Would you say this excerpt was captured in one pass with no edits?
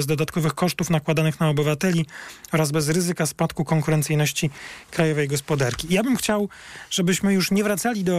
yes; 0 cuts

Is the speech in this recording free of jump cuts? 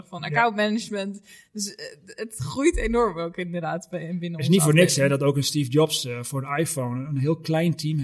yes; 0 cuts

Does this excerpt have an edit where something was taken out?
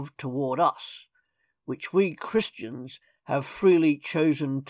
no; 0 cuts

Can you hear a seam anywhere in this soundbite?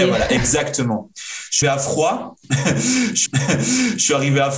yes; 2 cuts; at 1.6 s, 3.3 s

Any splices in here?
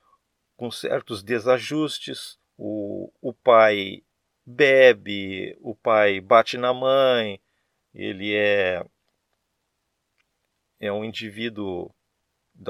yes; 1 cut; at 2.4 s

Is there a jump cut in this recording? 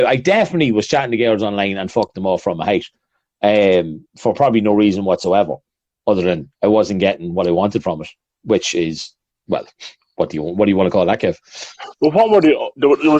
no; 0 cuts

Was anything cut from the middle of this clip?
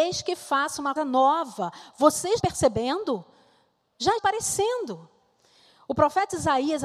yes; 3 cuts; at 1.0 s, 2.4 s, 4.2 s

